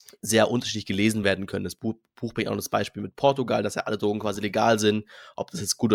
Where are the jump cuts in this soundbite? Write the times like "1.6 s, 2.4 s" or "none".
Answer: none